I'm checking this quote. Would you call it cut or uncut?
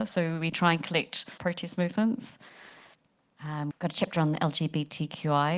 cut